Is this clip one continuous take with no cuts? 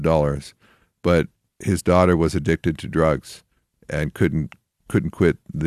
yes; 0 cuts

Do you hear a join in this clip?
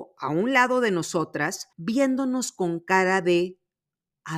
yes; 1 cut; at 1.7 s

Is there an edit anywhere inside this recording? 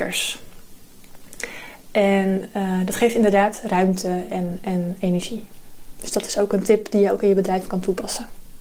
no; 0 cuts

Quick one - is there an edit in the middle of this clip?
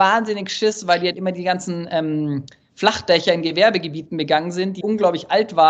yes; 1 cut; at 4.8 s

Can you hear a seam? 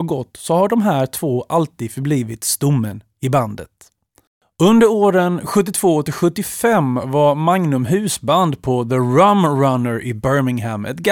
no; 0 cuts

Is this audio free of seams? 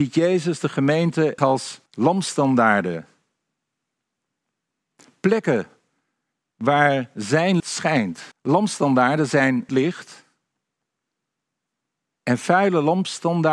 no; 5 cuts; at 1.4 s, 1.9 s, 7.6 s, 8.3 s, 9.7 s

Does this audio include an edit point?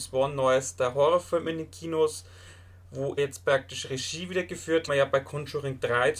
yes; 2 cuts; at 3.2 s, 4.9 s

